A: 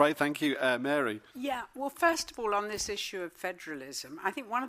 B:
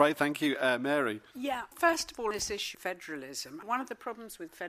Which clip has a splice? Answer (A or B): B